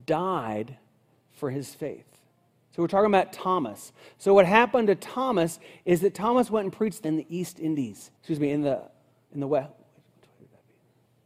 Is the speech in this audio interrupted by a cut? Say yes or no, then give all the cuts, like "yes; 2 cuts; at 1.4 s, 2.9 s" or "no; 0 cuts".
yes; 2 cuts; at 7.0 s, 8.2 s